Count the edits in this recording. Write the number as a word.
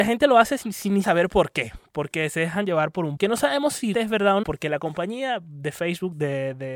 four